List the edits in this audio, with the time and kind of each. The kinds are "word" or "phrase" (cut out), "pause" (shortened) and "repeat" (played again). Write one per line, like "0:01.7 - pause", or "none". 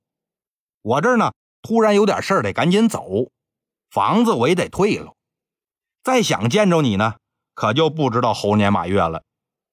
none

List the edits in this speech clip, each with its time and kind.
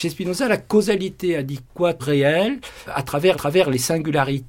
0:02.0 - word
0:02.9 - word
0:03.3 - repeat

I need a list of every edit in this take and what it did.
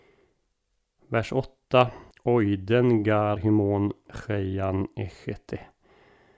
0:02.1 - pause
0:03.4 - word
0:04.1 - word

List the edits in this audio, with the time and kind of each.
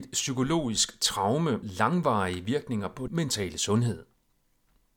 0:01.6 - word
0:03.1 - word

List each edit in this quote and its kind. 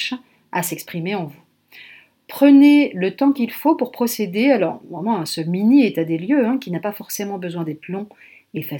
none

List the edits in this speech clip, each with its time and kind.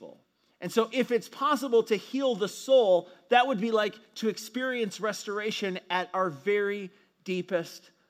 none

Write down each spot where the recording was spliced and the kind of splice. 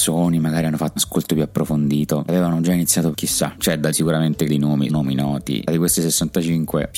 0:01.0 - word
0:02.3 - word
0:03.1 - word
0:03.9 - word
0:04.5 - word
0:04.9 - word

